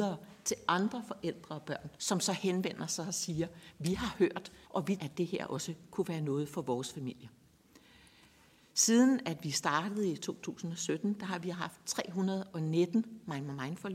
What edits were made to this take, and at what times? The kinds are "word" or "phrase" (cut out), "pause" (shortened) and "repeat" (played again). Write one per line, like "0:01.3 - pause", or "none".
0:02.0 - pause
0:04.6 - pause
0:05.0 - word